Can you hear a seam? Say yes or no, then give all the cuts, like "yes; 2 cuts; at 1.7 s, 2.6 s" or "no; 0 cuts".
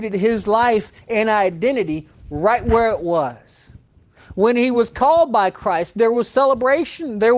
no; 0 cuts